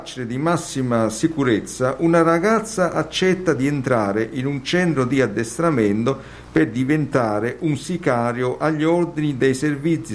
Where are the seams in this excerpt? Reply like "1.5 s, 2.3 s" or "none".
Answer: none